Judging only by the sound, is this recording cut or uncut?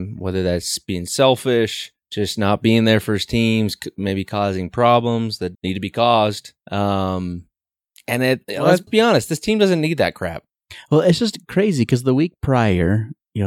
cut